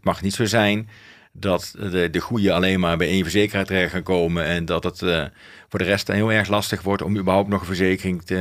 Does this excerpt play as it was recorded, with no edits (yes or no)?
yes